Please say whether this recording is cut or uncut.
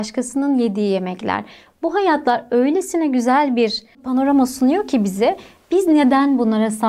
uncut